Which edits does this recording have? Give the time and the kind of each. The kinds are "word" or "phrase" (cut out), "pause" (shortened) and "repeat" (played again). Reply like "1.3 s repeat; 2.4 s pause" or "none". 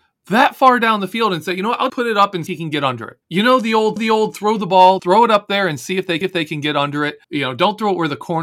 1.9 s word; 2.5 s phrase; 3.2 s pause; 4.0 s repeat; 5.0 s word; 6.2 s repeat; 7.2 s pause